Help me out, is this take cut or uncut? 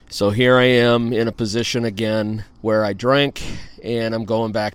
cut